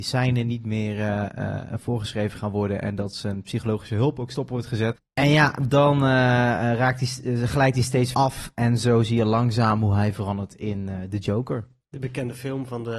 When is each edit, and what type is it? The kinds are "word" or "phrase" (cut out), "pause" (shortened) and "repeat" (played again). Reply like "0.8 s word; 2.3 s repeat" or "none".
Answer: 8.1 s word; 11.8 s pause